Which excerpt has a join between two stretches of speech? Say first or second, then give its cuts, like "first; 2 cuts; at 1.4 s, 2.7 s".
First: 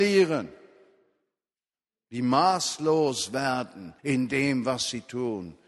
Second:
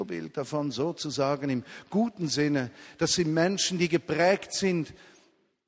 first; 1 cut; at 4.0 s